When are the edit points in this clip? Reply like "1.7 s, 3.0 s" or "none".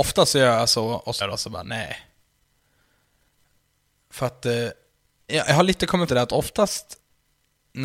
1.2 s, 5.3 s, 6.1 s